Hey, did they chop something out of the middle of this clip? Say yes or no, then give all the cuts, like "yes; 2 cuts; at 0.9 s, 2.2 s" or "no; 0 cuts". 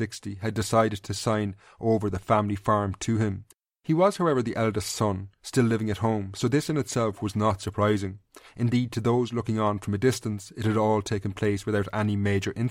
no; 0 cuts